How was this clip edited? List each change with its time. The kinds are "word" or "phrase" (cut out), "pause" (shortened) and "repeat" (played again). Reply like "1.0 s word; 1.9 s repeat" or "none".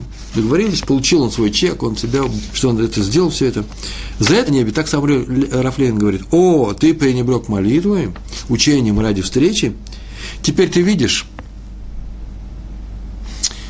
2.0 s word; 2.5 s phrase; 4.5 s phrase